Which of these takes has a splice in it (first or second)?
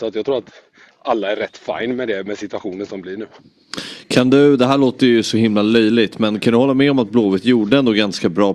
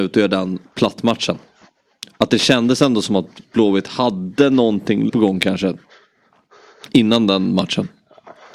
second